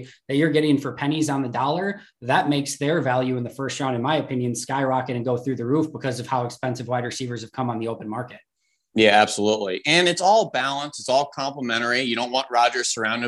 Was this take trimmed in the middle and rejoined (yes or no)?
no